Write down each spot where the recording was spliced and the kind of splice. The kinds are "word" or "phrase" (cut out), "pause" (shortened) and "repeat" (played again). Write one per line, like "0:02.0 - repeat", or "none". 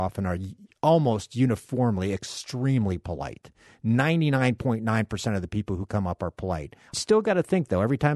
none